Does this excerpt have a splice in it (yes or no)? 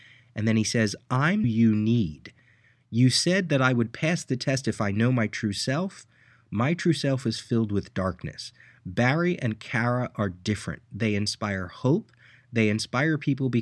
yes